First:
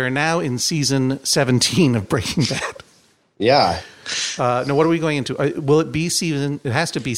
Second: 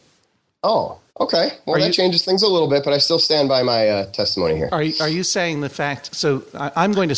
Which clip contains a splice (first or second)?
second